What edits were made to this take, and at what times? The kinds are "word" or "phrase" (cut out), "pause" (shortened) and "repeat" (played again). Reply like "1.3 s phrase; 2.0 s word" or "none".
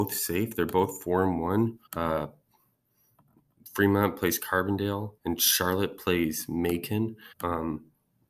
1.9 s pause; 5.2 s pause; 7.3 s pause